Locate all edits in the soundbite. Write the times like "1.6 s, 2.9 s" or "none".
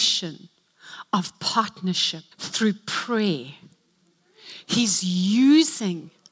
2.3 s